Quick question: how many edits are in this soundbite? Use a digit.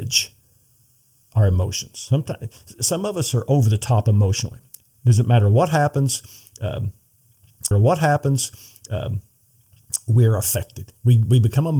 1